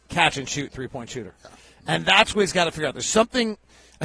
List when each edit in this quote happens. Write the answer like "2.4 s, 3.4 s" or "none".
none